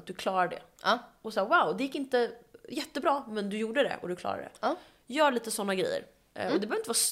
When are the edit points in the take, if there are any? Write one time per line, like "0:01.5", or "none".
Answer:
none